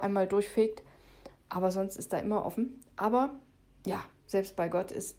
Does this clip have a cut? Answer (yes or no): no